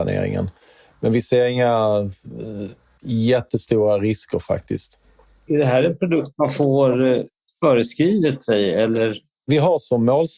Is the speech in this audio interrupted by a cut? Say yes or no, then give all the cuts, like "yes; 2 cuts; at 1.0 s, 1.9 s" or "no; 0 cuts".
no; 0 cuts